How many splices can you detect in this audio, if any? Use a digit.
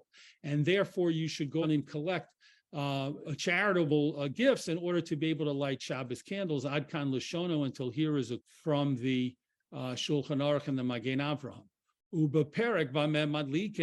3